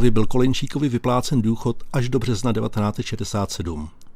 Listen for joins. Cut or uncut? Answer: uncut